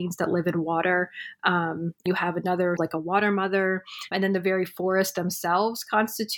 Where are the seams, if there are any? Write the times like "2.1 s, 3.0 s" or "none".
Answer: 2.1 s, 2.8 s, 4.1 s